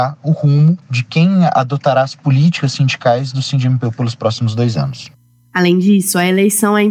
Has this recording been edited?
no; 0 cuts

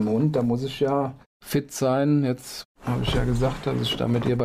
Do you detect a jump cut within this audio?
yes; 1 cut; at 2.7 s

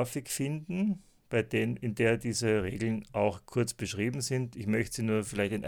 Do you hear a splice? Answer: no; 0 cuts

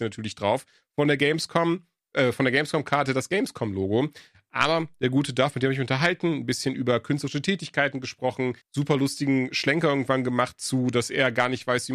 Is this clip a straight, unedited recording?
no; 1 cut; at 8.6 s

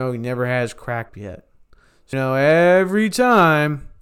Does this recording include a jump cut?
yes; 2 cuts; at 1.1 s, 2.1 s

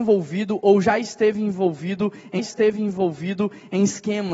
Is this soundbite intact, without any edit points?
no; 1 cut; at 2.4 s

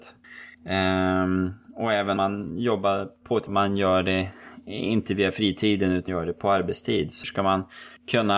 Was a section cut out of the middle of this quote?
yes; 4 cuts; at 2.2 s, 3.5 s, 6.1 s, 7.2 s

